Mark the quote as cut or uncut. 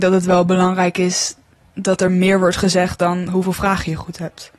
uncut